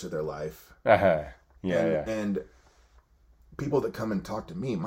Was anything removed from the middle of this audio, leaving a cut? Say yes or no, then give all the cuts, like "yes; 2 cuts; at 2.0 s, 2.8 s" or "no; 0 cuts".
no; 0 cuts